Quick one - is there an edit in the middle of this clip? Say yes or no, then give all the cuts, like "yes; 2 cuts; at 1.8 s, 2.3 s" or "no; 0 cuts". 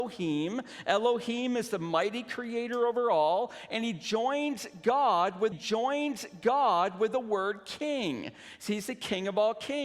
yes; 1 cut; at 5.5 s